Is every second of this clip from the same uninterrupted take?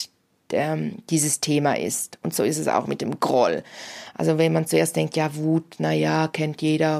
yes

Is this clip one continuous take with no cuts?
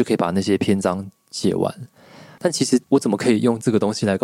no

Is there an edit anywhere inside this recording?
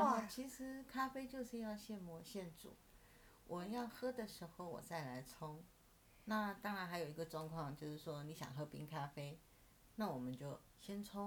no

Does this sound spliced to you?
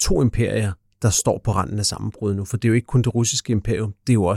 no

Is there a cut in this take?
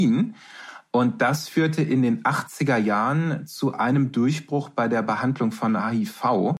no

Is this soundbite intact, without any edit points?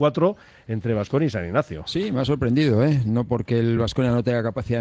yes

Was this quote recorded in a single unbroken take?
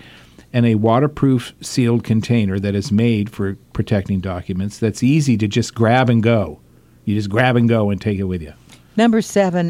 yes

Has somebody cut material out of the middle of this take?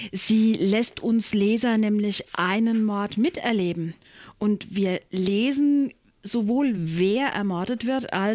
no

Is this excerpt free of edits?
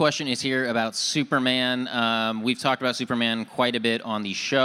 yes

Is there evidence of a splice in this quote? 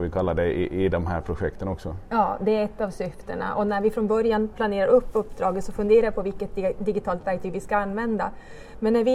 no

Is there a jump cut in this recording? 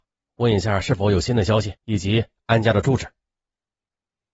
yes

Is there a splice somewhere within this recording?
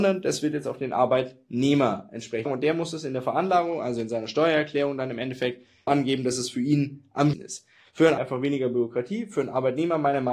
yes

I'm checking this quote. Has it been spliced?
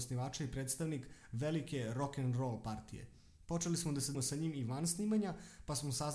yes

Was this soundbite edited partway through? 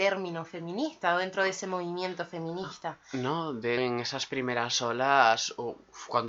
yes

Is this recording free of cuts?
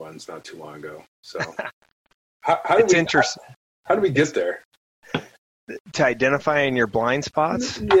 yes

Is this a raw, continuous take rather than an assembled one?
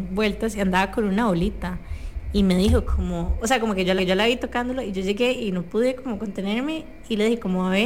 no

